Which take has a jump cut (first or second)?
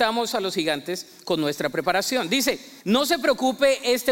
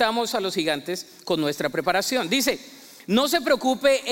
first